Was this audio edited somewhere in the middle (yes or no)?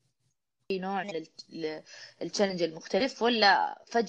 no